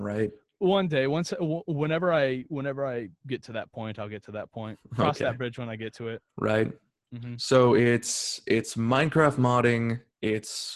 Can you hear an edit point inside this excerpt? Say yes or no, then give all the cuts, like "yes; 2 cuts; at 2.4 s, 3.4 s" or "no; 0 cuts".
yes; 1 cut; at 6.3 s